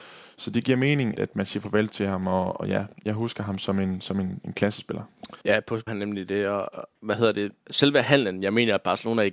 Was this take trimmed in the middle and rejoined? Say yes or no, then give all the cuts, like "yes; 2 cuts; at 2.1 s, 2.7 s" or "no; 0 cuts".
yes; 3 cuts; at 1.1 s, 5.4 s, 5.9 s